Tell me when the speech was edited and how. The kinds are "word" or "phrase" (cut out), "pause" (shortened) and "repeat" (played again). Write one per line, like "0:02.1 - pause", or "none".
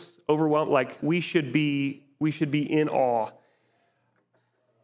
0:01.0 - word